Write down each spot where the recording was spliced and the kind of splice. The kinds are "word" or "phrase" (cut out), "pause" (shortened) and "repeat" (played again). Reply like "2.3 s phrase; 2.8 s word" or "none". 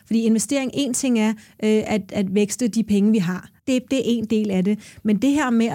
3.6 s pause